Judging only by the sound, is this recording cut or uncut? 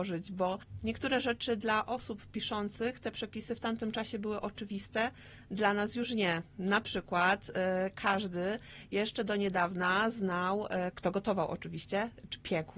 uncut